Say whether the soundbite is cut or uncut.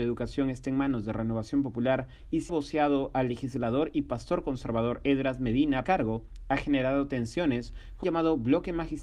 cut